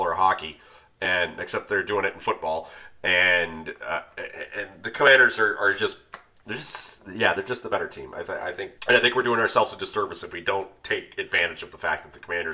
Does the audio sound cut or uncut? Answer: cut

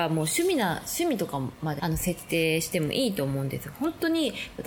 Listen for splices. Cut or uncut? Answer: cut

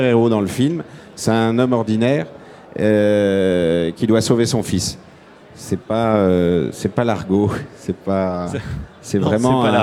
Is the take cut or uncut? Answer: uncut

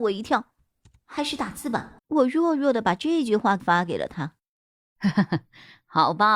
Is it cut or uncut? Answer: cut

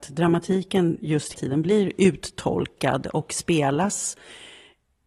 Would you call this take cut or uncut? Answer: cut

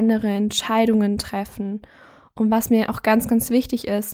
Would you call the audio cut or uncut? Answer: uncut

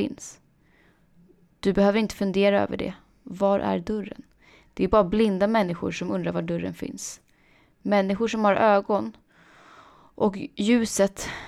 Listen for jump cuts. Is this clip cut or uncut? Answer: uncut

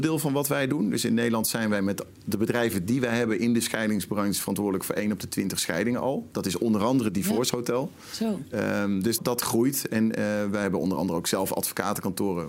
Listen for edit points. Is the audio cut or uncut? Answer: cut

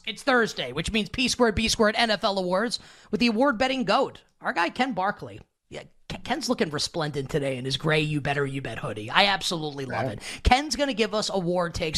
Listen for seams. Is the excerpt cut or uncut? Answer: uncut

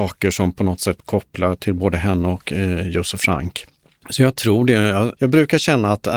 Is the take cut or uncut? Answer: uncut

